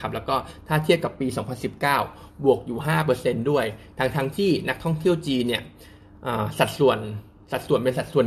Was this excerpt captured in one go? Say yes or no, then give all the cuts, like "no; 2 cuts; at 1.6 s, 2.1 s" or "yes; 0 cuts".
yes; 0 cuts